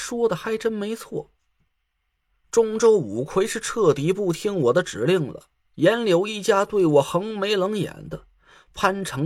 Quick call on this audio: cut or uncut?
uncut